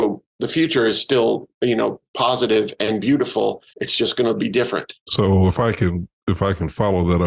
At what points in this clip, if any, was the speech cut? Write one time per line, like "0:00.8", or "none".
0:01.5
0:02.1
0:03.7
0:05.0